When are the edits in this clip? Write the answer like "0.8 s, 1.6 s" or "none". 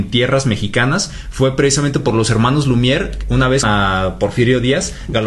3.6 s